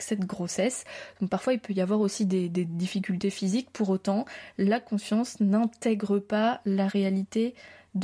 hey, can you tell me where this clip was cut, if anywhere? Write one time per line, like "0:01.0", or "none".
none